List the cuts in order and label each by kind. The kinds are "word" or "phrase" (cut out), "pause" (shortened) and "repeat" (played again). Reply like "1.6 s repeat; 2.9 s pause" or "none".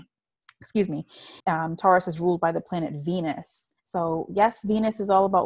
1.4 s pause; 3.8 s pause